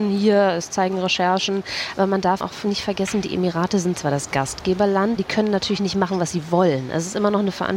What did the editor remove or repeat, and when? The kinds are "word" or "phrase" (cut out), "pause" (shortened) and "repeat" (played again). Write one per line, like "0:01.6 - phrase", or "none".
0:02.4 - word
0:05.2 - word